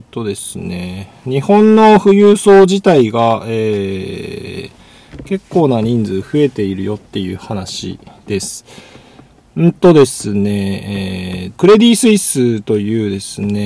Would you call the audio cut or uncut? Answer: cut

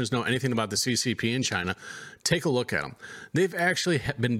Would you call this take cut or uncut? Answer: uncut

